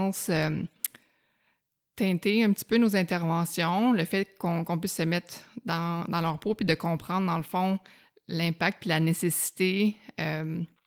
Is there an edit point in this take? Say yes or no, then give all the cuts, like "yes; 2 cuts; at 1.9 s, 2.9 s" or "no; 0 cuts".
no; 0 cuts